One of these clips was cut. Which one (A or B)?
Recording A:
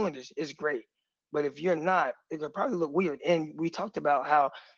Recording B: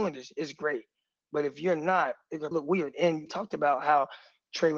B